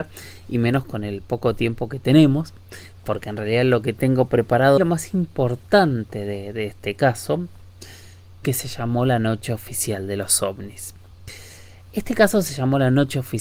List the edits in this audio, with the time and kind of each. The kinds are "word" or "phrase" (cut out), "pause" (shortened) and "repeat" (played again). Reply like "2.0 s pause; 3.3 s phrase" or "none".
4.8 s phrase; 8.4 s phrase